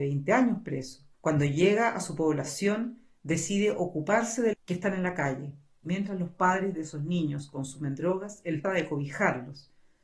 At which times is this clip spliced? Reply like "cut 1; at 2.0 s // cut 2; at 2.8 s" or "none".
cut 1; at 1.1 s // cut 2; at 4.5 s // cut 3; at 8.6 s